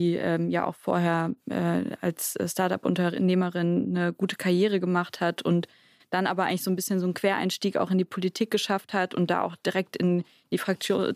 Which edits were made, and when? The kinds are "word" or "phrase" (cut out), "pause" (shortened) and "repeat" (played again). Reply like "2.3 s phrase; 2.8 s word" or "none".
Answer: none